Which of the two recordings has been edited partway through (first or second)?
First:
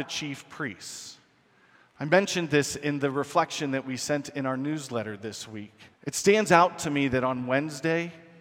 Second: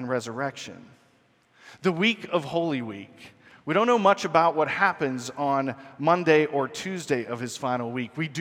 first